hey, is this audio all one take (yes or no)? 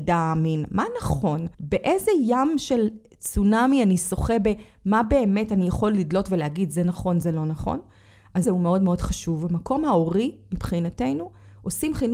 no